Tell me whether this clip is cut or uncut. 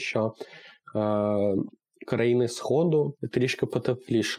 uncut